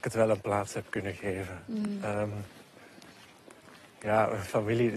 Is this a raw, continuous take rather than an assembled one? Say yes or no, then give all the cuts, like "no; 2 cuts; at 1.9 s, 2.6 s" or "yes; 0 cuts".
yes; 0 cuts